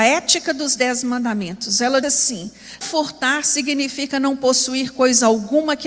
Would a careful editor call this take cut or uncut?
cut